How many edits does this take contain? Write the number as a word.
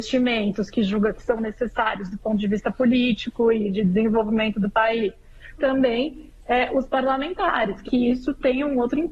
two